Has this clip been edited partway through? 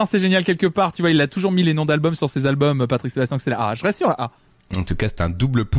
no; 0 cuts

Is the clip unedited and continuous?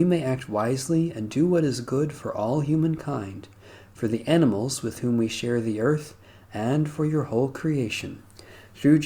yes; 0 cuts

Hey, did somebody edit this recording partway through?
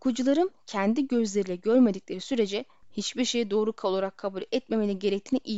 no; 0 cuts

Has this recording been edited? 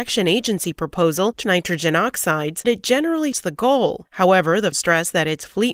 yes; 4 cuts; at 1.4 s, 2.6 s, 3.3 s, 4.7 s

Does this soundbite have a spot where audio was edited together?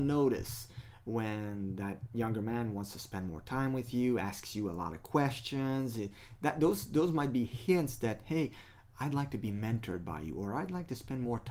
no; 0 cuts

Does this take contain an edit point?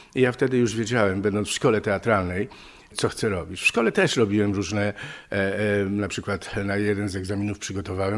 no; 0 cuts

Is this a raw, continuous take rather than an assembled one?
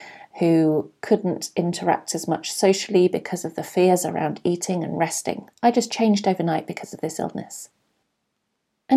no; 1 cut; at 5.5 s

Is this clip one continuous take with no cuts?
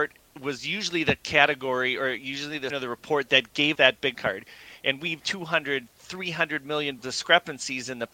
no; 5 cuts; at 2.7 s, 3.8 s, 4.1 s, 5.2 s, 7.0 s

